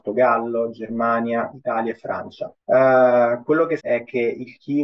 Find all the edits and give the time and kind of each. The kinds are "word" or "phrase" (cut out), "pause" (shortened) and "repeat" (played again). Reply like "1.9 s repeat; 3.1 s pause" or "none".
1.5 s word; 2.6 s pause; 3.8 s word